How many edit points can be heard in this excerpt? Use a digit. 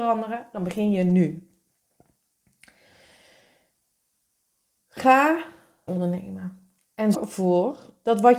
2